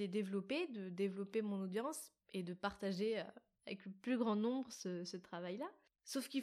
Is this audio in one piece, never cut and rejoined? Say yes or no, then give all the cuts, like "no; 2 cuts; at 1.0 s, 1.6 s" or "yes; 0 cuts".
yes; 0 cuts